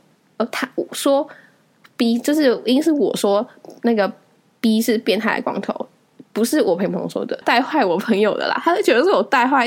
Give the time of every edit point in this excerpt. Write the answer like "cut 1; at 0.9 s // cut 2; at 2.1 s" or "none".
cut 1; at 7.4 s